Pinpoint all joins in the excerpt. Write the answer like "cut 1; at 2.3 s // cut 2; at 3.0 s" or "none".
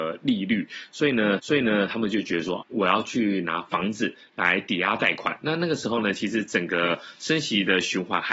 cut 1; at 1.4 s // cut 2; at 2.6 s